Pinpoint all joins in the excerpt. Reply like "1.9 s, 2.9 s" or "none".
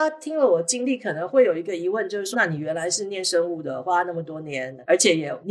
2.3 s